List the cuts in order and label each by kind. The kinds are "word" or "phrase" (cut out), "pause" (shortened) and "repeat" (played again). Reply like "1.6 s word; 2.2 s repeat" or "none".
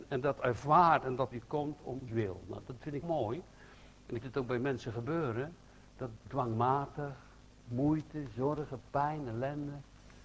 1.3 s phrase; 2.1 s word; 3.0 s word; 4.2 s word; 6.2 s word

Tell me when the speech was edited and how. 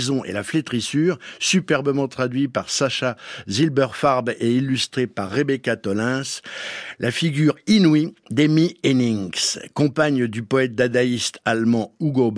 none

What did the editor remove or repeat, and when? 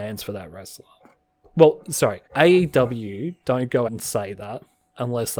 2.3 s pause; 3.9 s word

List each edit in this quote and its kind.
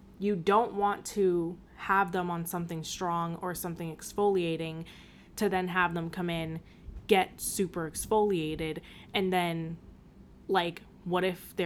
1.7 s pause

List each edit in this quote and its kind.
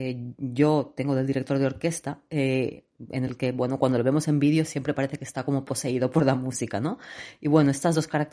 none

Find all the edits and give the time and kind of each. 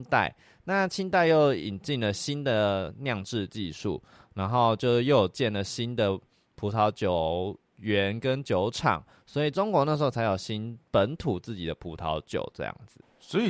none

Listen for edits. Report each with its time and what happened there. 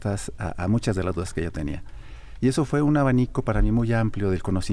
none

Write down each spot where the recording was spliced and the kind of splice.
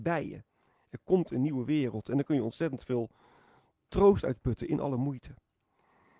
none

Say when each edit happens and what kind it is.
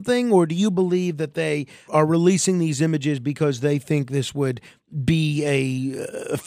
1.9 s word

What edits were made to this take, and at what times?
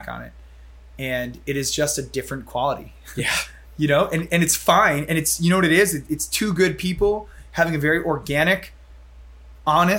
none

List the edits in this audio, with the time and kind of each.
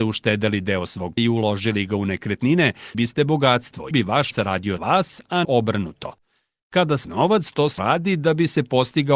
1.2 s word; 2.9 s word; 3.9 s word; 4.3 s word; 4.8 s word; 5.4 s word; 7.0 s word; 7.8 s word

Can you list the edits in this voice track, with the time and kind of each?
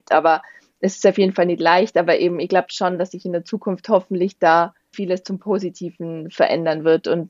4.9 s word

